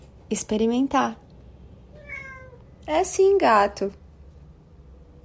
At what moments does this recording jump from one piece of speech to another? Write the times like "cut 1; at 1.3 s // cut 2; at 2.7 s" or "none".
none

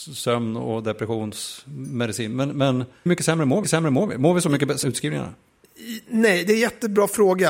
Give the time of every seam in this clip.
cut 1; at 3.1 s // cut 2; at 3.6 s // cut 3; at 4.8 s

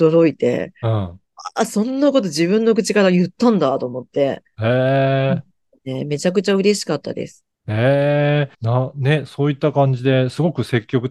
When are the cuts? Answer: cut 1; at 7.5 s // cut 2; at 8.5 s

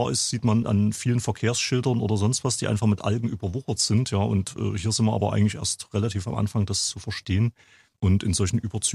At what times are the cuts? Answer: none

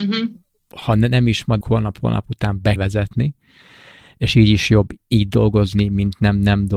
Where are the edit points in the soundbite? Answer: cut 1; at 1.6 s // cut 2; at 2.8 s

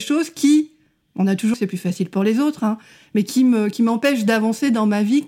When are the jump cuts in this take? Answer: cut 1; at 1.5 s

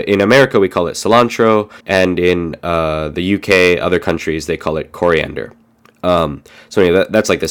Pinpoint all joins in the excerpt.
cut 1; at 1.8 s // cut 2; at 5.6 s

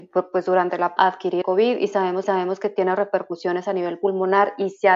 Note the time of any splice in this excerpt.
cut 1; at 1.0 s // cut 2; at 1.4 s // cut 3; at 2.2 s

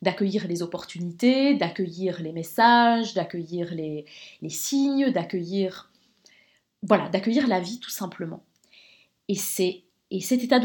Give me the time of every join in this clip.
none

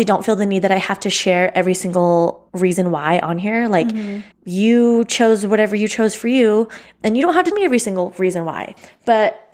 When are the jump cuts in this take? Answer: cut 1; at 2.5 s // cut 2; at 4.3 s // cut 3; at 7.5 s

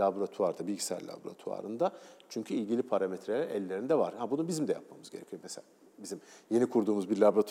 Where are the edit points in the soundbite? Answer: none

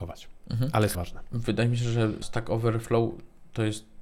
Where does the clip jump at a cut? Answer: cut 1; at 0.9 s // cut 2; at 2.2 s

